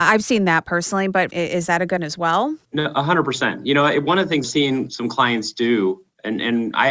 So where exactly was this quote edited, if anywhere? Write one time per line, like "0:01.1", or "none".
0:01.3
0:02.0
0:02.6
0:04.4